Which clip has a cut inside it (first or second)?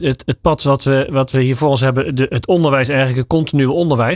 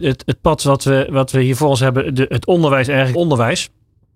second